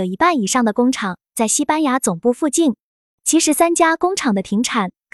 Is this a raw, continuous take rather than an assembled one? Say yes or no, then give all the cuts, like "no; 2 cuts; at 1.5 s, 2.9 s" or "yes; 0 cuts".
yes; 0 cuts